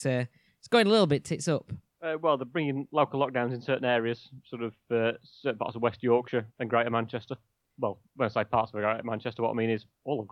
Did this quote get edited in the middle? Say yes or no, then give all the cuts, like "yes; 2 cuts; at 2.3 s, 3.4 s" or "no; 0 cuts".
yes; 2 cuts; at 6.5 s, 8.1 s